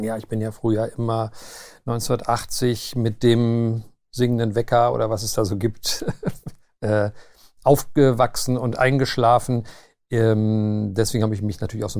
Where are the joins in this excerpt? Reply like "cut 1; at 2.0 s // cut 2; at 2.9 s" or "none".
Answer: none